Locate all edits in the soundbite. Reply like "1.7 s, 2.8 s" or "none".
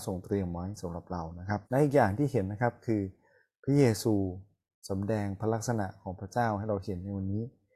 1.7 s